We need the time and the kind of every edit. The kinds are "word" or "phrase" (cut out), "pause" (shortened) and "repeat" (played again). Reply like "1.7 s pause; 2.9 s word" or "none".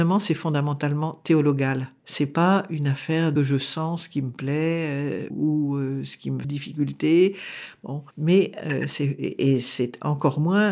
2.0 s pause; 3.4 s phrase; 5.3 s word; 6.4 s word; 8.1 s pause